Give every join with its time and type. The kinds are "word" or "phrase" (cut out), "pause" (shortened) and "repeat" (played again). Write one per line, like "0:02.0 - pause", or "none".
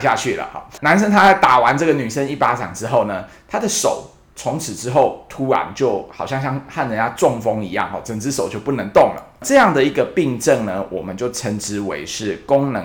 none